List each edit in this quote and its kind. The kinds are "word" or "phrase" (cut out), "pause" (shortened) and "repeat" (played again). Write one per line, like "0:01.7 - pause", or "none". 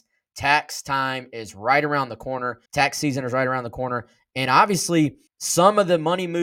0:02.7 - pause
0:05.3 - pause